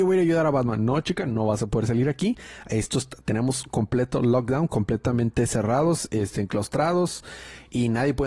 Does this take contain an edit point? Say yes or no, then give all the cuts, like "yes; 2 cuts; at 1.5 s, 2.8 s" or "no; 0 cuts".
no; 0 cuts